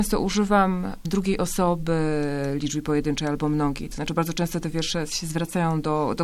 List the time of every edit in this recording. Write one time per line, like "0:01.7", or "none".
0:01.0